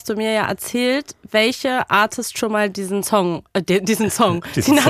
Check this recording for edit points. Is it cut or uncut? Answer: uncut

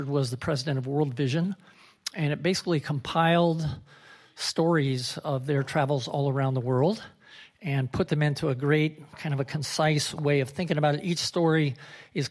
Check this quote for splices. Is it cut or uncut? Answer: uncut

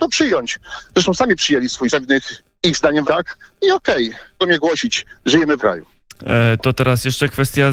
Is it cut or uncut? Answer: cut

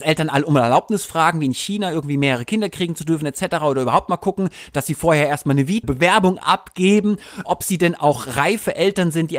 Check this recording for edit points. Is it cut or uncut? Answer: cut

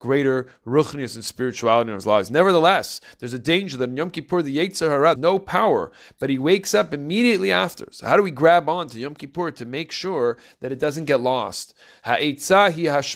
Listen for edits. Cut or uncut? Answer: cut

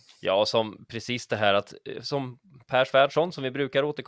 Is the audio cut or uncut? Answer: uncut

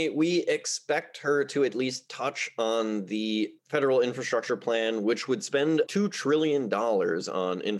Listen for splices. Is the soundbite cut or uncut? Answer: cut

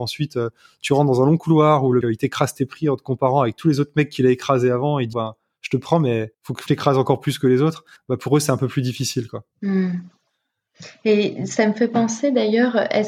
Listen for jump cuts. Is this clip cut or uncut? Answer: cut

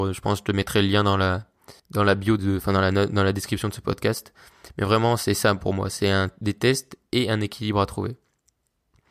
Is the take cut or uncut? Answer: cut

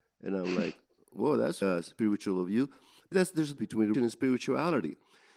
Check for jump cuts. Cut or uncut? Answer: cut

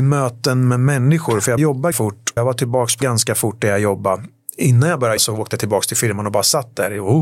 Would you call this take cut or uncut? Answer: cut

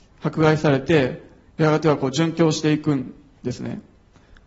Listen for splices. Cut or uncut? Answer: uncut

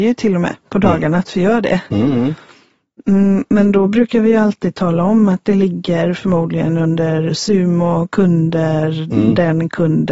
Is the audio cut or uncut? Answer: uncut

